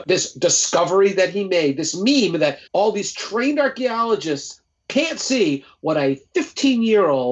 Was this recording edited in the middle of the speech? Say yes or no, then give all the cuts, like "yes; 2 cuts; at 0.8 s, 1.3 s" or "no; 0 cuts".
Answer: yes; 1 cut; at 2.7 s